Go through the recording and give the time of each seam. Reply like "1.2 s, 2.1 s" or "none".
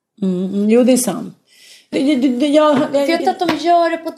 1.9 s, 3.2 s